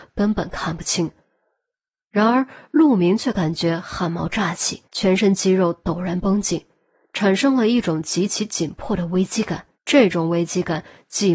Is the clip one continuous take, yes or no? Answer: no